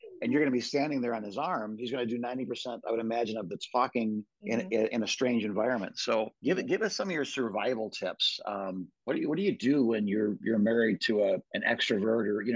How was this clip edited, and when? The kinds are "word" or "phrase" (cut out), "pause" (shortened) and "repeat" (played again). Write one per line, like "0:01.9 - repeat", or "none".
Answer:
0:04.3 - pause
0:06.3 - pause
0:08.9 - pause
0:11.5 - pause